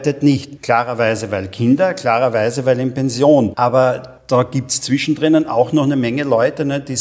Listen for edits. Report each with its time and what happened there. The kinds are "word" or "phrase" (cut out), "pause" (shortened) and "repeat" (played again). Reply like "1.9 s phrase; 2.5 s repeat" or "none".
4.2 s pause